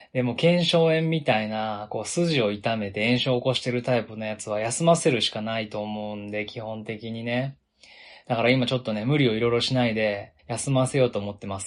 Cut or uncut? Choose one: cut